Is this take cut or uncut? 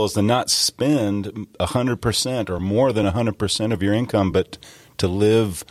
uncut